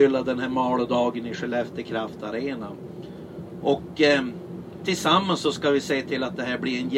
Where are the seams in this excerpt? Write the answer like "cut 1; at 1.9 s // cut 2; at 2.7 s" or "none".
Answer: none